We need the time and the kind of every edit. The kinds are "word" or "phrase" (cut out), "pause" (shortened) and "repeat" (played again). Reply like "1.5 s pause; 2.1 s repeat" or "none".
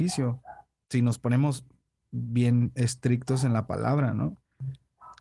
none